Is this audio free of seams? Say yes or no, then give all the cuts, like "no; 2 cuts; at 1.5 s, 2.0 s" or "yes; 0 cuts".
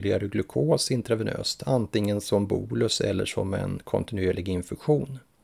yes; 0 cuts